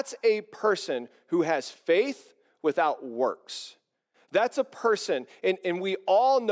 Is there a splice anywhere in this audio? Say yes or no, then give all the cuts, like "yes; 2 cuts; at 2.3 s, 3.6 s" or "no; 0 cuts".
no; 0 cuts